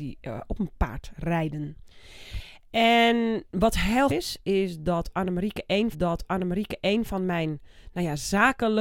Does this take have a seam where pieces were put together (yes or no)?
yes